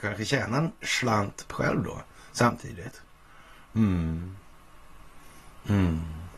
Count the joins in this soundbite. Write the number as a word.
one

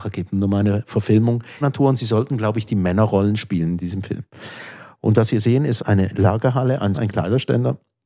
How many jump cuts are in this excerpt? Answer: three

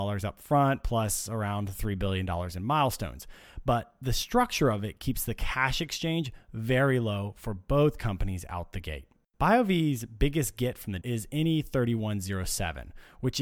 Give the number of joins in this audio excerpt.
two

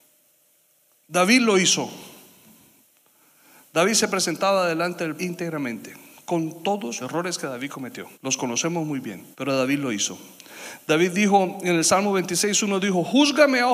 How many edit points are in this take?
four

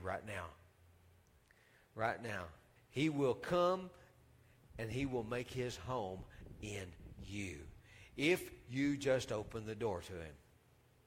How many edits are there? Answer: one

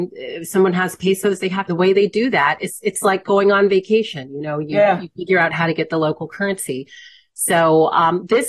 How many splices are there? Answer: one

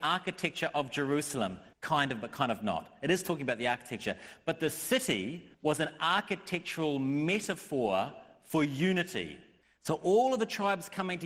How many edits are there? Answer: three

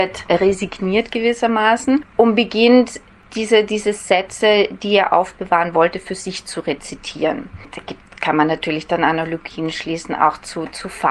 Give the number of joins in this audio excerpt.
zero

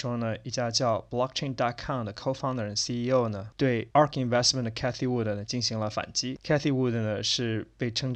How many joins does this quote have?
zero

